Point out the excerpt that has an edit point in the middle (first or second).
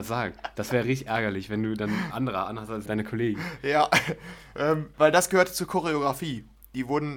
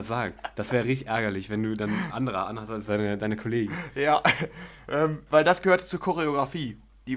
first